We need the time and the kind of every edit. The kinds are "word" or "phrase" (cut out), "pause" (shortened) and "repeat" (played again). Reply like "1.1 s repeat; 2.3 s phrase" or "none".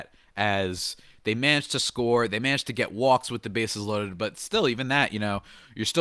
none